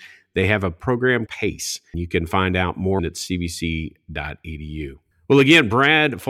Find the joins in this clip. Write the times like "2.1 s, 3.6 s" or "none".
1.3 s, 1.9 s, 3.0 s, 5.1 s